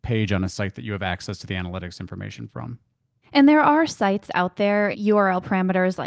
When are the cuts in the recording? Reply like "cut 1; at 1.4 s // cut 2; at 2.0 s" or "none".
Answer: cut 1; at 4.9 s